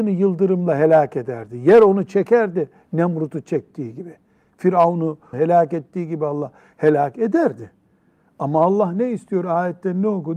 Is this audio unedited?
no; 1 cut; at 5.3 s

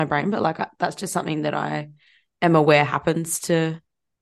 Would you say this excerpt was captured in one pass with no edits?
yes; 0 cuts

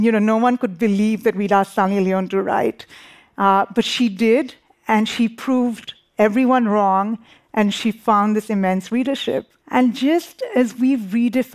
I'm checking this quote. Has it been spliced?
yes; 1 cut; at 9.6 s

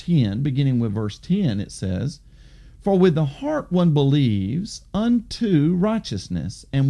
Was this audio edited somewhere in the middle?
no; 0 cuts

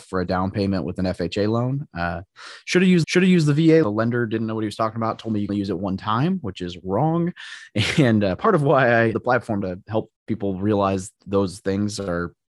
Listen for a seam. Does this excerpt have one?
yes; 7 cuts; at 3.0 s, 3.8 s, 5.5 s, 9.1 s, 9.6 s, 10.2 s, 11.2 s

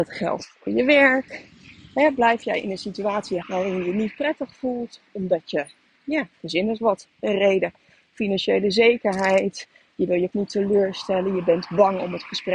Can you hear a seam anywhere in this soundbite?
yes; 2 cuts; at 3.4 s, 10.3 s

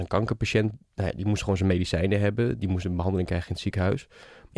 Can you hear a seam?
no; 0 cuts

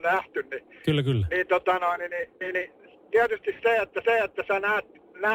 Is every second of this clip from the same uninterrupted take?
no; 1 cut; at 4.0 s

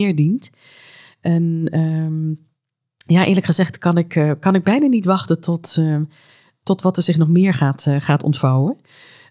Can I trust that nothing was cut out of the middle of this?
yes; 0 cuts

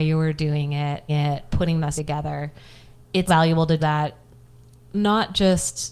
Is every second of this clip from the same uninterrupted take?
no; 4 cuts; at 1.1 s, 2.0 s, 3.3 s, 3.8 s

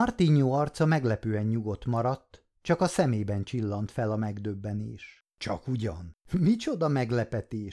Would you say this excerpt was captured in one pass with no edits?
no; 3 cuts; at 2.6 s, 5.3 s, 6.2 s

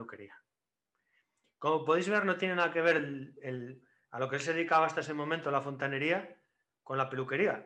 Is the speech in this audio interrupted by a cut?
no; 0 cuts

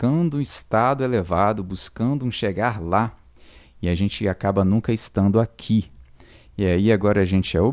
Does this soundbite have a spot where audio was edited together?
no; 0 cuts

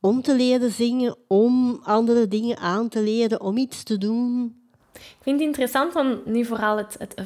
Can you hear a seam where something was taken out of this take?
no; 0 cuts

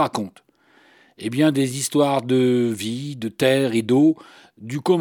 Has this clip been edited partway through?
no; 0 cuts

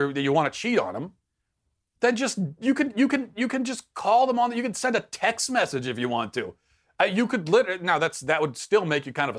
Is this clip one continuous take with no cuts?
yes; 0 cuts

